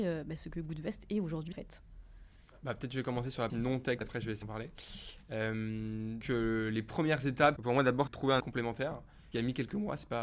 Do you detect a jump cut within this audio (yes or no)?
yes